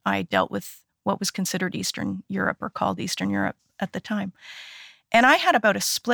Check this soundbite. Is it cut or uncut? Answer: uncut